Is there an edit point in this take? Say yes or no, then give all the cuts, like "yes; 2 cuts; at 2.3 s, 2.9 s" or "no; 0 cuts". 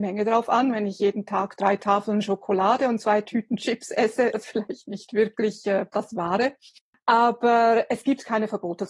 yes; 1 cut; at 4.3 s